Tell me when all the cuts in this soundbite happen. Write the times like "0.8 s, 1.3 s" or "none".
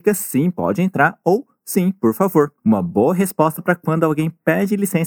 2.6 s